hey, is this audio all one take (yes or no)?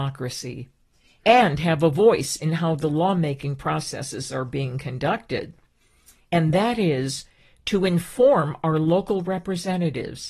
yes